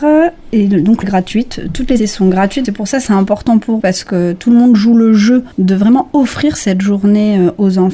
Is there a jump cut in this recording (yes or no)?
yes